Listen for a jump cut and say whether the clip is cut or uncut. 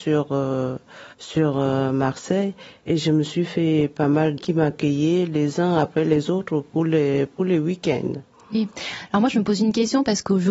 cut